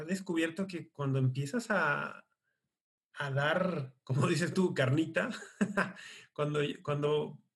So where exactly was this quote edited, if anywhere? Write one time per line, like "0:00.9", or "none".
none